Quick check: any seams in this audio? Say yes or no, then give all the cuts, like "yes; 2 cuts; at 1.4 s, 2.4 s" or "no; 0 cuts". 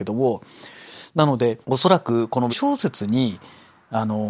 yes; 2 cuts; at 1.6 s, 2.5 s